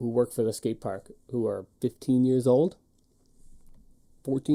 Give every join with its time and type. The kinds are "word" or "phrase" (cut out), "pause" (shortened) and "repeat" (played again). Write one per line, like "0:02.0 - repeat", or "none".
0:01.7 - pause